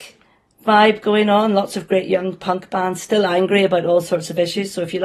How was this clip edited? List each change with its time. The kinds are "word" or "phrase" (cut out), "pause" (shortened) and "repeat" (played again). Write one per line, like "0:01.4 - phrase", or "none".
none